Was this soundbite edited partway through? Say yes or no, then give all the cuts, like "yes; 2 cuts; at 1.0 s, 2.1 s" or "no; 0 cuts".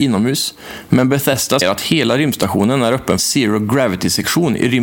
yes; 2 cuts; at 1.6 s, 3.2 s